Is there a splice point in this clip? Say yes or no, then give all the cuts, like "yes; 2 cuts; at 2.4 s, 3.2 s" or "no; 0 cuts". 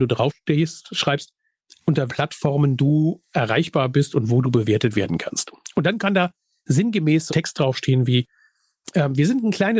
yes; 2 cuts; at 2.1 s, 7.3 s